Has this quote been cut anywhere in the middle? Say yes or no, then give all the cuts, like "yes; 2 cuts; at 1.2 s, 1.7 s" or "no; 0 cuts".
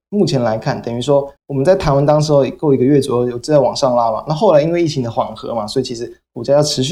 yes; 1 cut; at 1.4 s